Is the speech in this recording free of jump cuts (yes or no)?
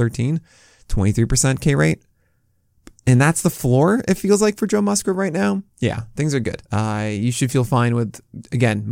no